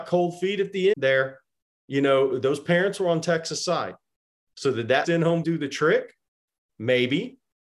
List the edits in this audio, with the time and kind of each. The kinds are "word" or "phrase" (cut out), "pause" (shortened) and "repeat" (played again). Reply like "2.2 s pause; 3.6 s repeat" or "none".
0.9 s word; 5.0 s word; 5.4 s word